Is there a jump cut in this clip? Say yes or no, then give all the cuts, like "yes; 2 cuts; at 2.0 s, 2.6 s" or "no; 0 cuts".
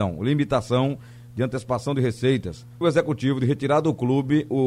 yes; 1 cut; at 2.8 s